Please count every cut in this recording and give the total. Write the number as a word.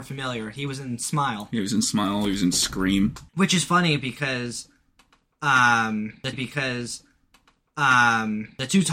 two